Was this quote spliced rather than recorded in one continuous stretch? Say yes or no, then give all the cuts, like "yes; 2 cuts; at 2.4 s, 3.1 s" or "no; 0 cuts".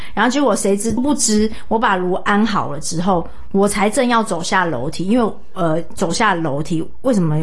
yes; 1 cut; at 1.0 s